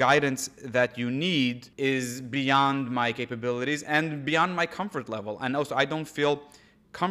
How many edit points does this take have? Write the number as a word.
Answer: one